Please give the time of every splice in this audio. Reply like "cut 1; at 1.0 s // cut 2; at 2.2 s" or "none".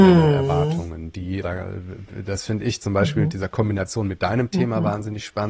cut 1; at 1.4 s

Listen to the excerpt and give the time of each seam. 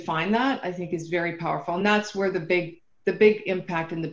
none

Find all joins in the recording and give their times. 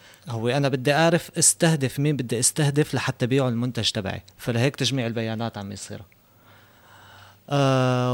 cut 1; at 4.3 s

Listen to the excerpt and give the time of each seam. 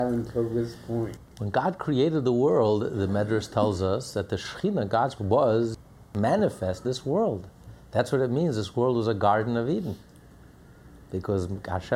cut 1; at 5.2 s // cut 2; at 6.8 s

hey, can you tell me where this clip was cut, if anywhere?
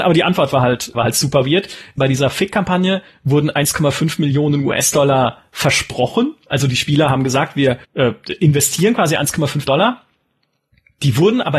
cut 1; at 0.9 s // cut 2; at 2.0 s // cut 3; at 7.8 s // cut 4; at 9.7 s

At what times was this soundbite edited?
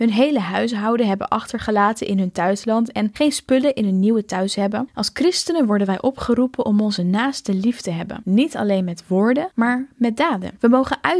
none

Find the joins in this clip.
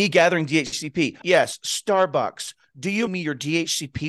cut 1; at 1.2 s // cut 2; at 3.1 s

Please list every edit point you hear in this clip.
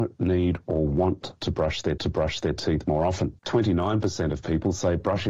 cut 1; at 2.0 s // cut 2; at 3.4 s

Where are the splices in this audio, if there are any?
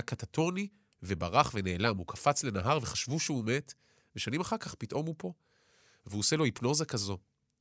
none

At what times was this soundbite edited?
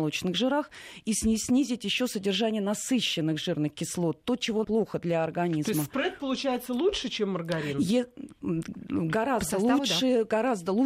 cut 1; at 4.6 s

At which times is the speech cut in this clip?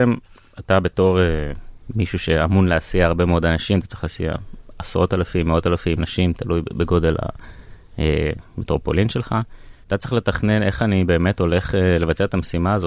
cut 1; at 6.0 s // cut 2; at 9.8 s

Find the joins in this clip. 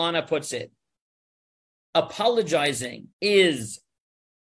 cut 1; at 3.1 s

